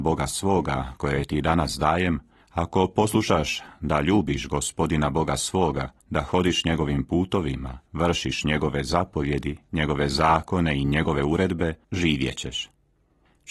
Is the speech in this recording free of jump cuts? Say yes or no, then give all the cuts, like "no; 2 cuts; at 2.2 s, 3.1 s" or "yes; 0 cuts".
no; 3 cuts; at 6.0 s, 7.9 s, 11.8 s